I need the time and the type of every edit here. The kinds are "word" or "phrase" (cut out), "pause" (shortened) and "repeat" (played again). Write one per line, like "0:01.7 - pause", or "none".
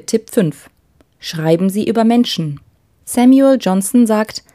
0:02.9 - pause